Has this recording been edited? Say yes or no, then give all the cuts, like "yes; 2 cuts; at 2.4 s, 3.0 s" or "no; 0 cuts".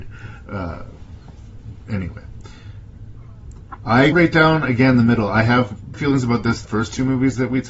yes; 3 cuts; at 4.1 s, 5.9 s, 6.6 s